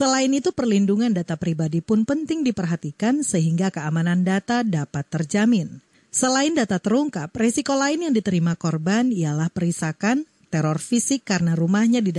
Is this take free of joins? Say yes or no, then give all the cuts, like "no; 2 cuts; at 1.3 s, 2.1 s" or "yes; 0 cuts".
yes; 0 cuts